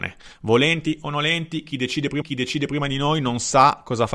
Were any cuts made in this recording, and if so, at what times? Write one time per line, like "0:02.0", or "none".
0:02.2